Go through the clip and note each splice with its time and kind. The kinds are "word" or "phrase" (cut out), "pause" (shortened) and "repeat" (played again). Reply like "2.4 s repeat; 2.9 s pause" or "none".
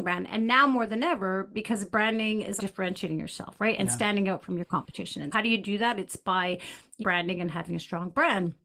2.6 s phrase; 5.3 s word; 7.0 s phrase